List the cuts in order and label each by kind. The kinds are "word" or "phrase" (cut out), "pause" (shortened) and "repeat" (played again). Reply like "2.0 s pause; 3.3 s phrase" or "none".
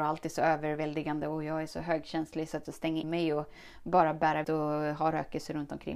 2.6 s phrase; 3.0 s word; 4.4 s word